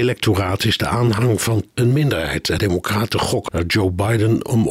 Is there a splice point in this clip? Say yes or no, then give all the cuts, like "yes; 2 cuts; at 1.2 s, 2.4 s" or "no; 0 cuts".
yes; 3 cuts; at 1.7 s, 2.6 s, 3.5 s